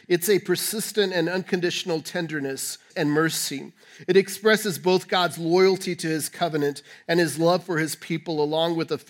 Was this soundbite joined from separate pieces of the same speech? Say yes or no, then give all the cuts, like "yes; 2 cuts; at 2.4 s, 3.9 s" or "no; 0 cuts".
yes; 1 cut; at 2.9 s